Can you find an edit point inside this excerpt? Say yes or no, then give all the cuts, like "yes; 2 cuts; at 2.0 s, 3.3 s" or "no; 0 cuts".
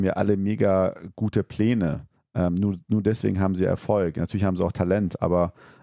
yes; 1 cut; at 2.2 s